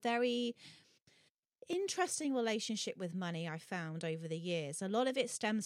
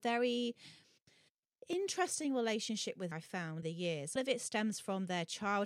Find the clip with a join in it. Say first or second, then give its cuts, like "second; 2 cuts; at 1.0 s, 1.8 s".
second; 3 cuts; at 3.1 s, 3.6 s, 4.2 s